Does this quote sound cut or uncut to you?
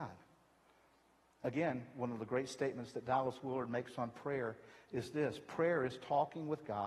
uncut